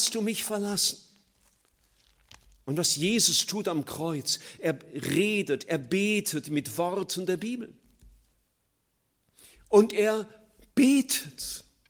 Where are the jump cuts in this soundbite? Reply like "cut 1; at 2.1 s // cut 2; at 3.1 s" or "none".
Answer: none